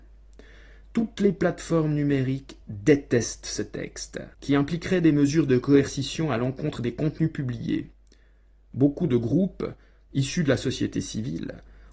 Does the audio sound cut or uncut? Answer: cut